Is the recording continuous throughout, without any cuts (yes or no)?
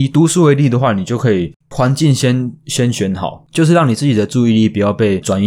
no